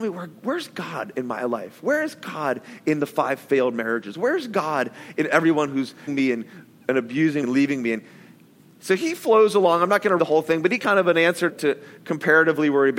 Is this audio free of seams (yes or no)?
no